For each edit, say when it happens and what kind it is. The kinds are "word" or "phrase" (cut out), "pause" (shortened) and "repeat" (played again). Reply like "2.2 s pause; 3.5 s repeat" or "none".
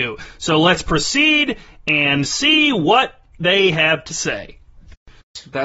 none